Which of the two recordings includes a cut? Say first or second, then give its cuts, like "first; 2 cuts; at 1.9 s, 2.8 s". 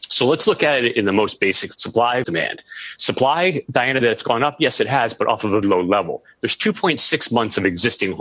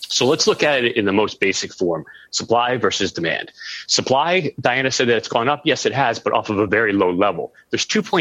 first; 4 cuts; at 1.7 s, 2.2 s, 4.0 s, 5.6 s